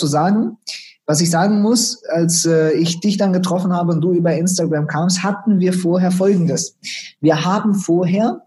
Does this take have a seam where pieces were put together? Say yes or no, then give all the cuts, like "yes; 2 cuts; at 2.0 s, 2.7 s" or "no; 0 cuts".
no; 0 cuts